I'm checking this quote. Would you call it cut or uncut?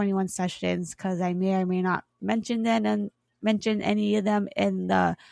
uncut